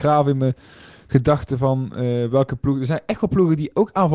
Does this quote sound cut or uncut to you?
uncut